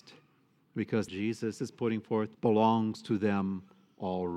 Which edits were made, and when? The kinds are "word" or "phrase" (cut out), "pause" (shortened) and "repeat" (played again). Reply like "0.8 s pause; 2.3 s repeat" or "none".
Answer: 1.1 s phrase; 2.3 s pause